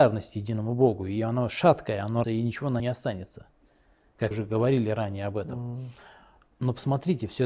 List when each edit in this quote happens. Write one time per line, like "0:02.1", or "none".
0:02.2
0:02.8
0:04.3